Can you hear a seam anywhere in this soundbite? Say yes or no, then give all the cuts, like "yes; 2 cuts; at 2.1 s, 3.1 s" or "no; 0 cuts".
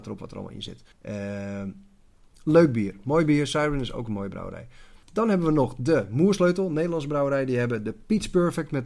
yes; 2 cuts; at 0.9 s, 5.0 s